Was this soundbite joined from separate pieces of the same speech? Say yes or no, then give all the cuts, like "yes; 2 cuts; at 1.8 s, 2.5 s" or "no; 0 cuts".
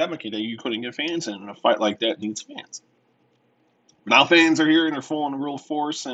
no; 0 cuts